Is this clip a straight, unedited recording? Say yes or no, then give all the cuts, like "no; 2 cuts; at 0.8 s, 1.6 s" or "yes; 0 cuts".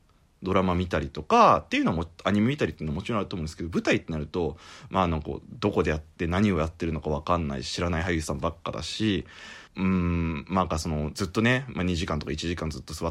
no; 1 cut; at 9.7 s